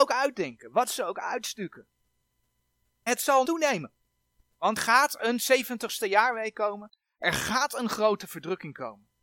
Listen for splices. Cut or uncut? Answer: cut